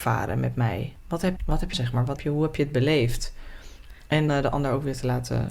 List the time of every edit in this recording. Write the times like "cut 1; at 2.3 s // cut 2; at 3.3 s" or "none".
cut 1; at 1.4 s // cut 2; at 1.7 s // cut 3; at 2.2 s // cut 4; at 4.3 s

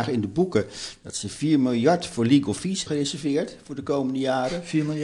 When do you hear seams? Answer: cut 1; at 2.9 s

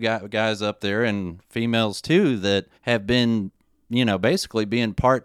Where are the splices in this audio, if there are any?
cut 1; at 2.7 s

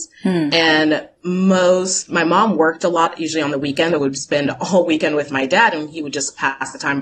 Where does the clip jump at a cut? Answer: cut 1; at 1.2 s

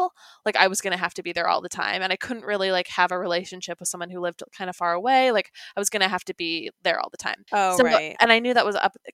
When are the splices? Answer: cut 1; at 7.5 s

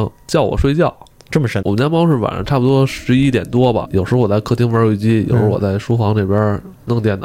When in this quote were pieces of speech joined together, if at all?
cut 1; at 1.3 s

